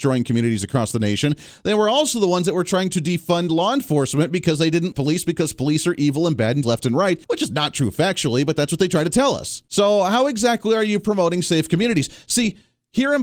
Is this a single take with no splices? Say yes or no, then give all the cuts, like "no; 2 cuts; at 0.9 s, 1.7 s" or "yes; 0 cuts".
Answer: no; 4 cuts; at 4.9 s, 6.6 s, 7.2 s, 9.7 s